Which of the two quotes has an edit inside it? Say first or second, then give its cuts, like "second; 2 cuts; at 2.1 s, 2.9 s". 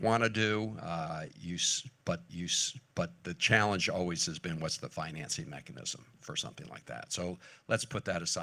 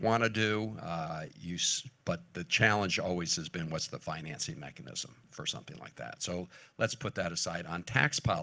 first; 1 cut; at 2.3 s